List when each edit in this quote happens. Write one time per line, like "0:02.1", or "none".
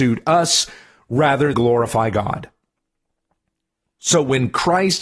0:01.5